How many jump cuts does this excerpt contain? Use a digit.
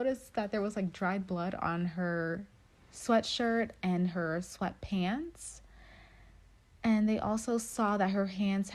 0